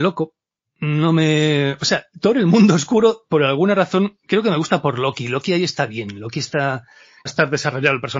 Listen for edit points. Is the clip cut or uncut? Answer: cut